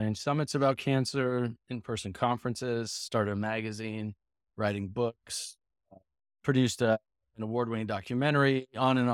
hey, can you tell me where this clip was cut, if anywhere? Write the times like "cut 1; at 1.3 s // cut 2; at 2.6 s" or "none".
none